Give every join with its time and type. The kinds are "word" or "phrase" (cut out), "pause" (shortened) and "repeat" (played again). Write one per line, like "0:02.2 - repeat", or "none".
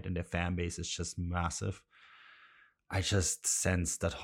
none